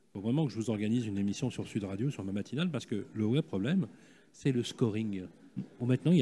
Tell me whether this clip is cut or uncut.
uncut